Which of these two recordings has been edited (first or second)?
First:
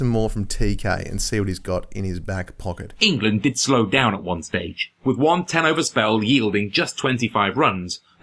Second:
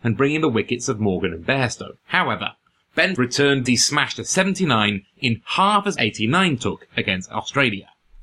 second